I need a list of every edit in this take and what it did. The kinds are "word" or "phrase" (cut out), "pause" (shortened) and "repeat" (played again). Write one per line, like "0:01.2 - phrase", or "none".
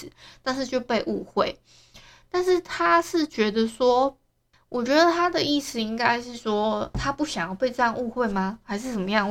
none